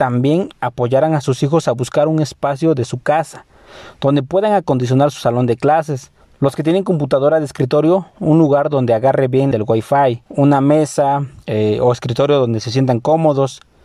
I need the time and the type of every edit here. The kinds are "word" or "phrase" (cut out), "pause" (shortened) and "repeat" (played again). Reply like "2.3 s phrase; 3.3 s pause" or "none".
6.2 s pause; 9.5 s phrase; 10.3 s pause; 11.4 s pause

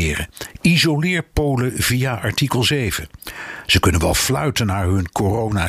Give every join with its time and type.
none

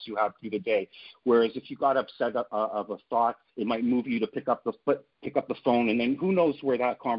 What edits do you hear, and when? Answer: 3.5 s pause; 5.1 s pause

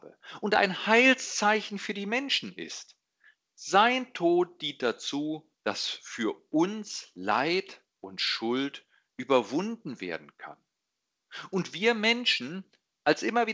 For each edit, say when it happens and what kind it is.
5.5 s pause

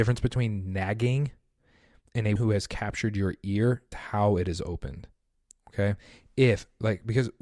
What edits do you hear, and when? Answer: 2.4 s word; 3.9 s word

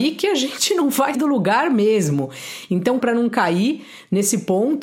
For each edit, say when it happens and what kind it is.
1.1 s word; 3.0 s word

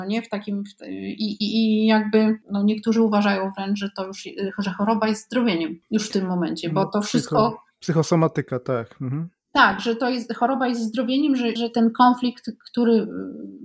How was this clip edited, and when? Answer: 11.6 s word

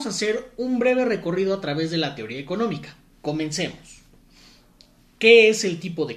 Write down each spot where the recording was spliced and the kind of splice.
3.1 s pause

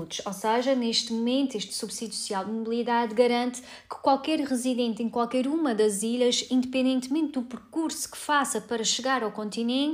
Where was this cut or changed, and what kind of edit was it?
none

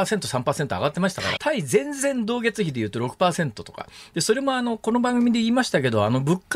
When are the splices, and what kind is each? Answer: 1.4 s phrase

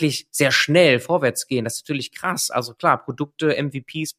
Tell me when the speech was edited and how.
none

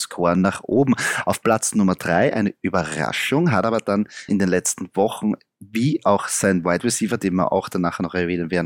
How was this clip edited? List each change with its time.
4.3 s word

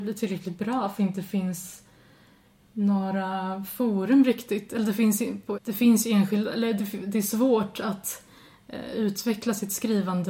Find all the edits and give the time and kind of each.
1.0 s word; 5.5 s word

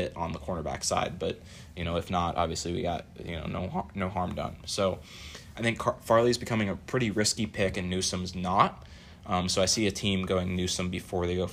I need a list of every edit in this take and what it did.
none

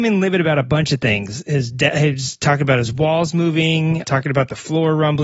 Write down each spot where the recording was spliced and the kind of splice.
4.0 s word

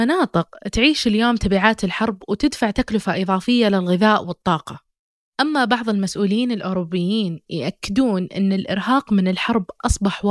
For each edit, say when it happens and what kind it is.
none

